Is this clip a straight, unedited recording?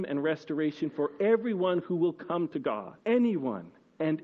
no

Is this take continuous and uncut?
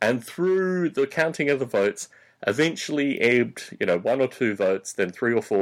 yes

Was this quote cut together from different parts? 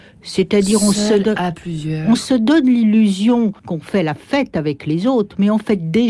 yes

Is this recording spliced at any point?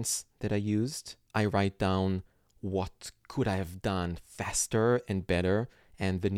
no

